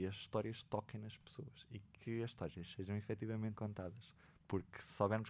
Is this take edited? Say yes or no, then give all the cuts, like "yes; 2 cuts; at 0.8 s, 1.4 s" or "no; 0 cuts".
yes; 1 cut; at 3.6 s